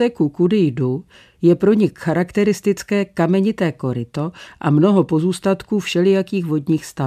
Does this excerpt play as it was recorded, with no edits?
yes; 0 cuts

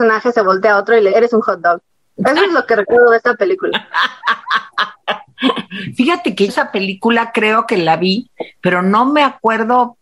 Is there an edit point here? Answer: yes; 3 cuts; at 1.1 s, 1.9 s, 6.5 s

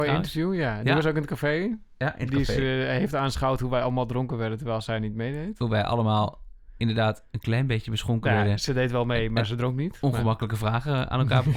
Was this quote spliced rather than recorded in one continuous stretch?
no; 0 cuts

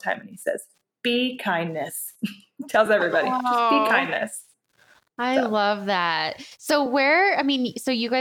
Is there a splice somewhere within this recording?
no; 0 cuts

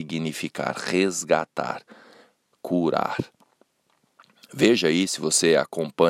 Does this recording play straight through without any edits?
yes; 0 cuts

